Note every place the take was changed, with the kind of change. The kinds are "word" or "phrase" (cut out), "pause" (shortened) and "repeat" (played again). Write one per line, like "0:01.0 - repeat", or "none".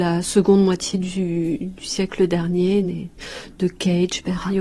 none

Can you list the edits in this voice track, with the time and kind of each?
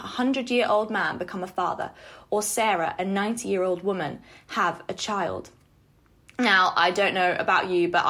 none

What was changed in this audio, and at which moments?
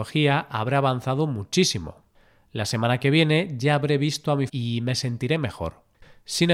0:04.5 - word

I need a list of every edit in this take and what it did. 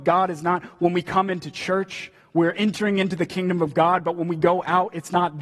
none

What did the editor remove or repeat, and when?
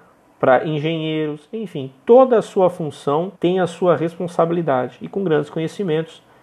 0:03.4 - pause

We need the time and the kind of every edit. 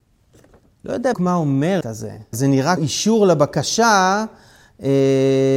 0:01.1 - word
0:01.8 - word
0:02.3 - word
0:02.8 - word

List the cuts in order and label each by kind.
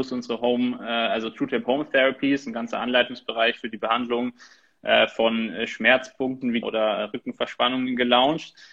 0:06.6 - word

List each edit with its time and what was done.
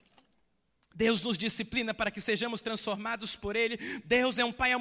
none

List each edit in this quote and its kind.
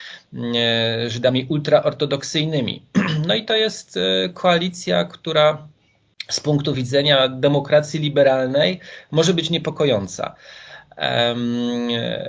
none

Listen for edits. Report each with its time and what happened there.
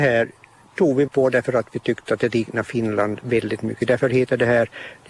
0:01.1 - word
0:03.2 - word

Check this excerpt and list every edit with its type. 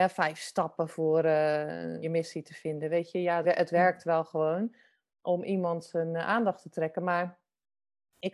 0:02.0 - word
0:03.4 - word

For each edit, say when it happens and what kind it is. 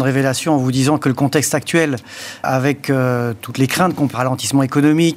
0:02.4 - word
0:04.1 - word

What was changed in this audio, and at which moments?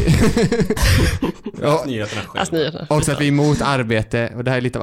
none

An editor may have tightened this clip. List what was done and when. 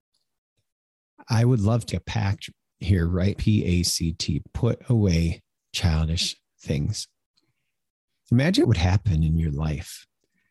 0:01.9 - word
0:03.3 - word
0:04.4 - word
0:08.6 - word

